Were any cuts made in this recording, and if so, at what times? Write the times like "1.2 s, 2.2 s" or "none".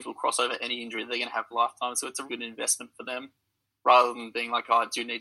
1.5 s, 2.3 s